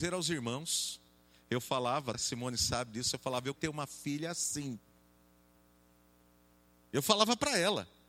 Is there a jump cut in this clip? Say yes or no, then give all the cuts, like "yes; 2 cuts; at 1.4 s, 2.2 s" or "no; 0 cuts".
yes; 2 cuts; at 2.1 s, 3.6 s